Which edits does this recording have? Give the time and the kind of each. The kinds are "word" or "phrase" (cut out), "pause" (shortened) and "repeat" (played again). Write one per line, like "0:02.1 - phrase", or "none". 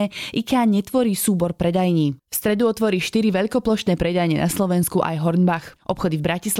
0:02.2 - pause